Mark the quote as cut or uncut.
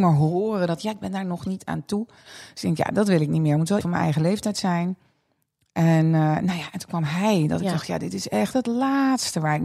cut